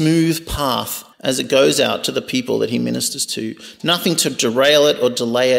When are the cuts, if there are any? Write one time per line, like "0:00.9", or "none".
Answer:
0:01.1